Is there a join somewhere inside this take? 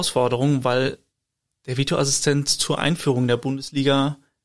no; 0 cuts

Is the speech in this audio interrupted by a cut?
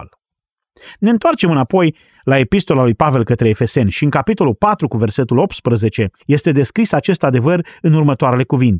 yes; 1 cut; at 6.2 s

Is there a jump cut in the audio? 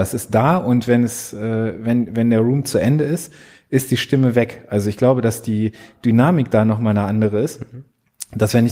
no; 0 cuts

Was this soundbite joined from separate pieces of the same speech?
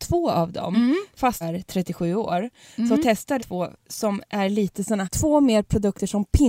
yes; 3 cuts; at 1.4 s, 3.4 s, 5.0 s

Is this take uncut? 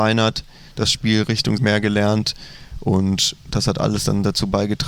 no; 1 cut; at 1.6 s

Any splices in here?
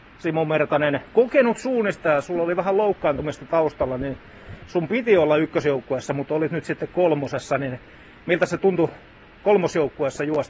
no; 0 cuts

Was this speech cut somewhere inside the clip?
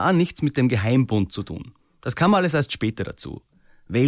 no; 0 cuts

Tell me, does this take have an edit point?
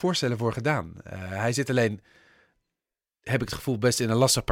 no; 0 cuts

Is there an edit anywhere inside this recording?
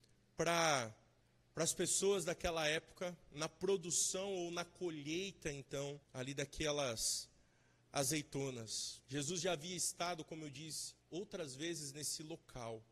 yes; 4 cuts; at 1.2 s, 6.0 s, 9.0 s, 11.0 s

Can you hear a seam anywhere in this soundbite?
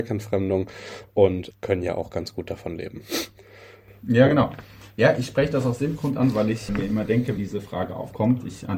yes; 3 cuts; at 1.5 s, 6.7 s, 7.4 s

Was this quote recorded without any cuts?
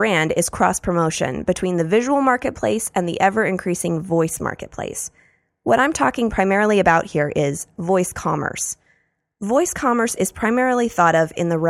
yes; 0 cuts

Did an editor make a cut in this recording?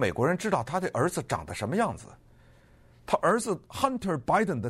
no; 0 cuts

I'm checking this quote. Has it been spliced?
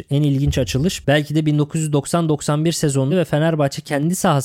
yes; 1 cut; at 3.1 s

